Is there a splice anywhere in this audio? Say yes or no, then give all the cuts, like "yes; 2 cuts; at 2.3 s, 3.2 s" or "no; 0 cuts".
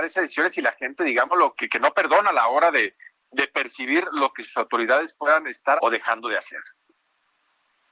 yes; 2 cuts; at 1.5 s, 5.8 s